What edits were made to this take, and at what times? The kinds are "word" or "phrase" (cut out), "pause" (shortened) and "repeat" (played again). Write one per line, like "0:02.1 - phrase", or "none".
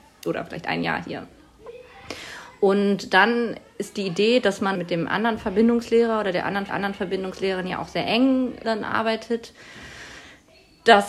0:04.7 - phrase
0:06.7 - repeat
0:08.6 - word

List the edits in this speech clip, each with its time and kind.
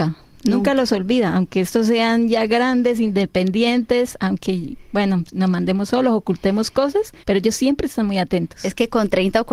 0:07.2 - pause

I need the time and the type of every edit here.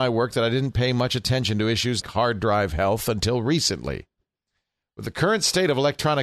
0:02.0 - word

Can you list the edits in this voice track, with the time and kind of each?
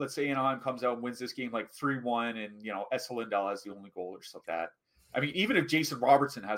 0:04.4 - word

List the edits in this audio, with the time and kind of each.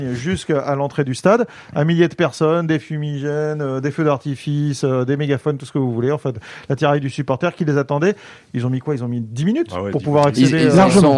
none

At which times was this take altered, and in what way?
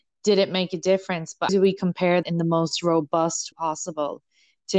0:01.5 - word
0:02.2 - word
0:03.5 - word

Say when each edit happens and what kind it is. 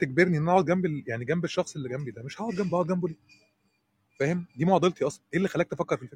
none

